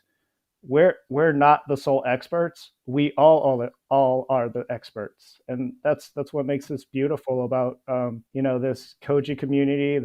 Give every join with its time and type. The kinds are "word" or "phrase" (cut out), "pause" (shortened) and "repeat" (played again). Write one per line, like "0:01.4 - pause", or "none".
0:08.3 - pause